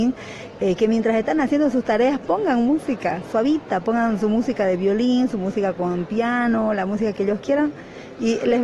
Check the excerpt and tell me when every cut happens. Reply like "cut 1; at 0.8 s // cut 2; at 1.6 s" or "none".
none